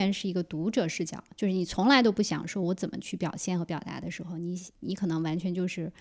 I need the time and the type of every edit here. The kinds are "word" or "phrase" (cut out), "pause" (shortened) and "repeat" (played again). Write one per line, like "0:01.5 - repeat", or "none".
0:04.7 - pause